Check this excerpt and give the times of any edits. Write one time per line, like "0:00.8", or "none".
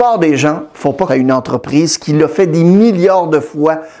0:01.1